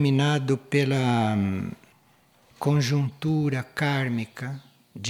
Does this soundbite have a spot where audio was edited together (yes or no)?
no